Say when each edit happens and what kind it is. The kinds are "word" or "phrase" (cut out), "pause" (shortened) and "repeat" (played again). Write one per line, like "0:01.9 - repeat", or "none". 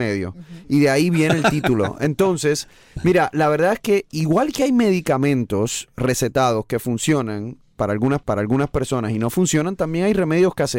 0:08.2 - repeat